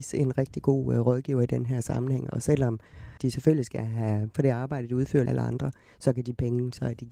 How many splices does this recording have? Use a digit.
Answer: 3